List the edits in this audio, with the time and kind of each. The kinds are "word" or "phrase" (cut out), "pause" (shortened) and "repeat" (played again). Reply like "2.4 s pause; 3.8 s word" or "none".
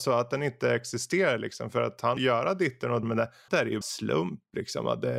2.2 s word; 3.0 s word; 3.5 s word; 3.8 s word